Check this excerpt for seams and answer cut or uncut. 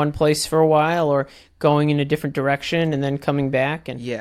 uncut